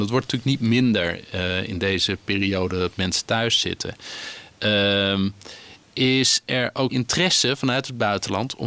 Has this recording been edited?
yes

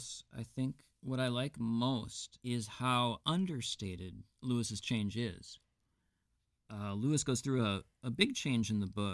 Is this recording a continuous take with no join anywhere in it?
yes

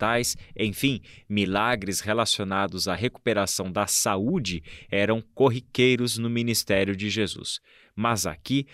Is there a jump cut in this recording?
no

